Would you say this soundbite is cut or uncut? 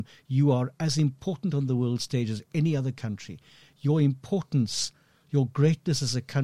uncut